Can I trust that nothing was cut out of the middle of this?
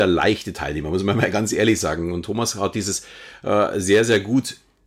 yes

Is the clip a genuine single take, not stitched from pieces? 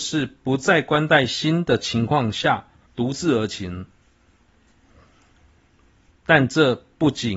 no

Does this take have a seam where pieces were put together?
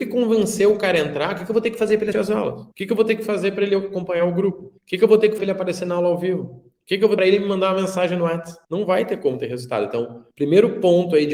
yes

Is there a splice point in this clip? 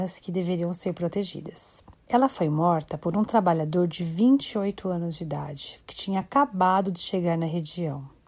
no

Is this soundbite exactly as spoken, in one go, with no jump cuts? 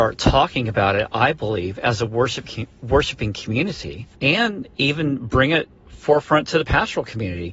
no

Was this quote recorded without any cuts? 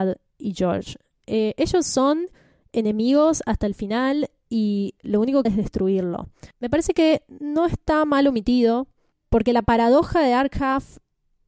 no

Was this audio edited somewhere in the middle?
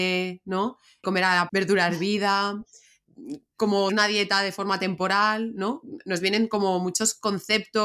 yes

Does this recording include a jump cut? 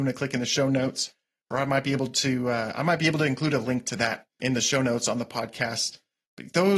yes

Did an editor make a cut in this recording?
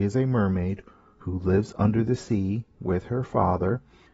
no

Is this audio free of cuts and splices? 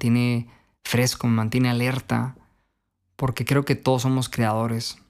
yes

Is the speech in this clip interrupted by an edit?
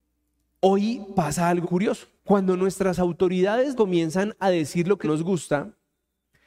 yes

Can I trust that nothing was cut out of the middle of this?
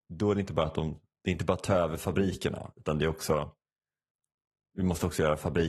yes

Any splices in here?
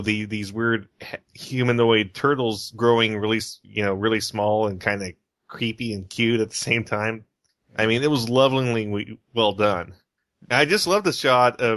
no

